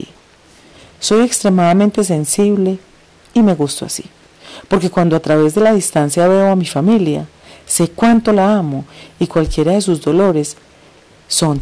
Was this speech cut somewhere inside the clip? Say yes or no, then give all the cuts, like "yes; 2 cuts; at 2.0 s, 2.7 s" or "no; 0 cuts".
no; 0 cuts